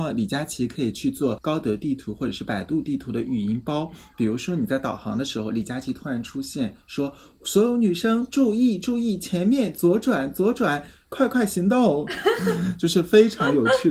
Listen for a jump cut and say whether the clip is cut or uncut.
uncut